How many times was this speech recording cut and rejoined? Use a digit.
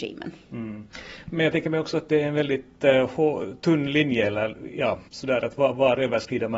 1